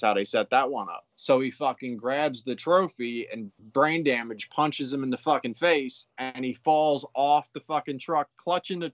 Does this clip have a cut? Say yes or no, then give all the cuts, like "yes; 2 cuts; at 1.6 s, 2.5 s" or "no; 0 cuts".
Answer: yes; 1 cut; at 1.1 s